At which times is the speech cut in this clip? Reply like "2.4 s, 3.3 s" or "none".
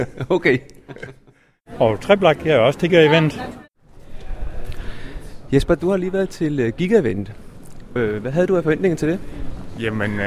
2.9 s, 8.0 s